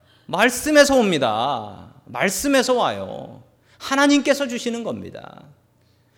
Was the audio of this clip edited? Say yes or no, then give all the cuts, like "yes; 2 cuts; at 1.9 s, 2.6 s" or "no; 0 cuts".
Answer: no; 0 cuts